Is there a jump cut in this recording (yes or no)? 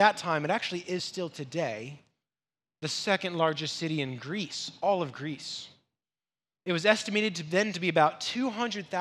no